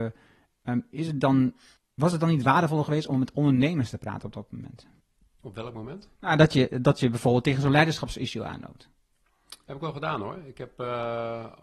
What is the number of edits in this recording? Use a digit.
2